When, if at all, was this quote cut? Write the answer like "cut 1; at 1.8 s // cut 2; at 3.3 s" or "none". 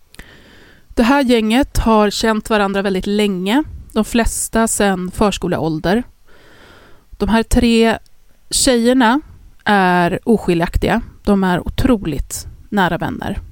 none